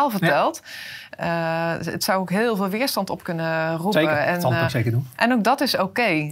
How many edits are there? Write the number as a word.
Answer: zero